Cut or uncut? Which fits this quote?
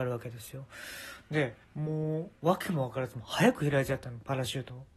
cut